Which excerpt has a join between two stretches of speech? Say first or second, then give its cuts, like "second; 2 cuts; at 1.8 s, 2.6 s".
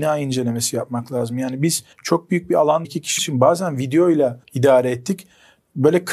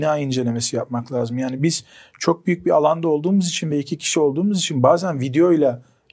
first; 4 cuts; at 1.9 s, 2.8 s, 3.2 s, 4.4 s